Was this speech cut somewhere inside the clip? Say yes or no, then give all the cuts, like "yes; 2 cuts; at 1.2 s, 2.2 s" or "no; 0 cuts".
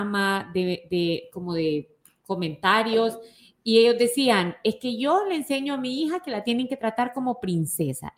no; 0 cuts